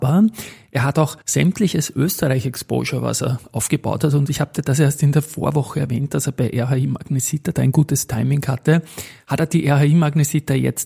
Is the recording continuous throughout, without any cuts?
no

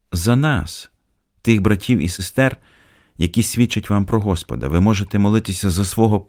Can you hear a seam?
no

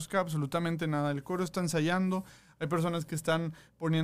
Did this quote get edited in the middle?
no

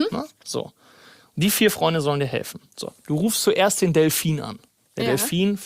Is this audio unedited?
yes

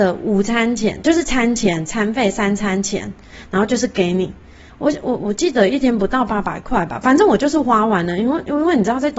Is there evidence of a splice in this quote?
no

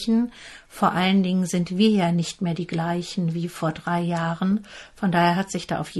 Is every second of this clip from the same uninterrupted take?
yes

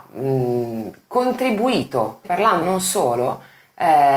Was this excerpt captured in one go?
no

